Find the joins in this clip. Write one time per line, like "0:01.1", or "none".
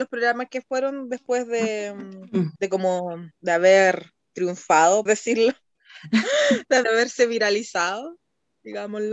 0:02.6
0:03.3
0:05.1
0:06.8